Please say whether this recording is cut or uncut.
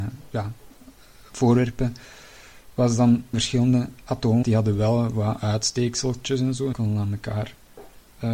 cut